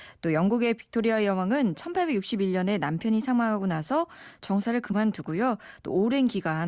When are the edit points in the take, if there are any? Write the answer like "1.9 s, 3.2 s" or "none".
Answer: none